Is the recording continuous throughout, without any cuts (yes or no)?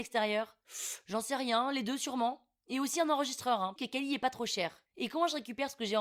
no